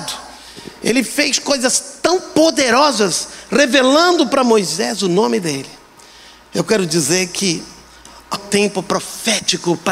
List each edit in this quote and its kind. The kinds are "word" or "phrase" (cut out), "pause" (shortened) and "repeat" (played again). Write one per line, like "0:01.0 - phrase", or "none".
0:08.3 - word